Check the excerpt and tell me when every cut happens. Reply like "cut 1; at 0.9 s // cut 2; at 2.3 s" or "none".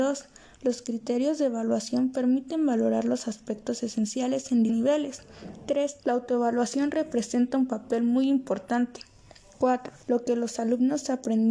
cut 1; at 4.7 s // cut 2; at 6.0 s // cut 3; at 10.0 s